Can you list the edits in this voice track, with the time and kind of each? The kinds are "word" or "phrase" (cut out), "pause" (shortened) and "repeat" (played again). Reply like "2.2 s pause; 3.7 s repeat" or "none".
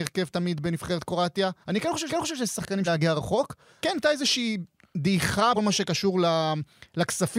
1.6 s pause; 2.1 s repeat; 2.9 s word; 3.8 s word; 5.5 s word